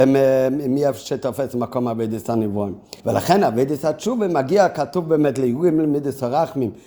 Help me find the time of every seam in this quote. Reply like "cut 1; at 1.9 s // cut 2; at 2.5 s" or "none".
cut 1; at 3.0 s